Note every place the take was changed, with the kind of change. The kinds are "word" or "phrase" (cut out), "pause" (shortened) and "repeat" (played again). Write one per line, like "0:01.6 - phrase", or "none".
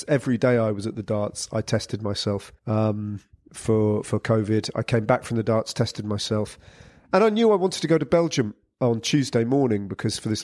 0:02.6 - pause